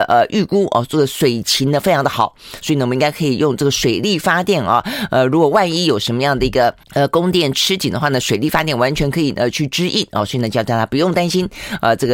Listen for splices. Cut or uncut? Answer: cut